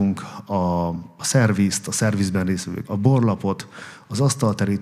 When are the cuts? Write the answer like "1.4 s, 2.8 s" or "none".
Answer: 2.9 s